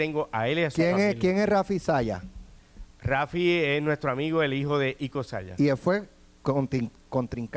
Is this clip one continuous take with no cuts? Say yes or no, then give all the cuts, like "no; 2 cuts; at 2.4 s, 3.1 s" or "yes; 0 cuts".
yes; 0 cuts